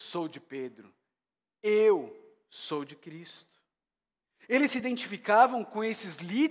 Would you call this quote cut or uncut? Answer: uncut